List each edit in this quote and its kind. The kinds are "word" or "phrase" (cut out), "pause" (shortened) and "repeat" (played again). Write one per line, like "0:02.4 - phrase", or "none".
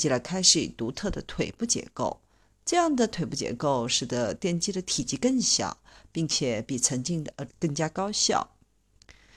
0:07.5 - phrase